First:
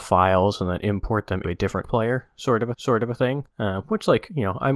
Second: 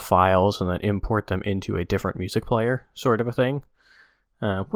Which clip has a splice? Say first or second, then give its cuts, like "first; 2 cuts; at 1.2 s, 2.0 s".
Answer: first; 4 cuts; at 1.4 s, 1.8 s, 2.7 s, 3.5 s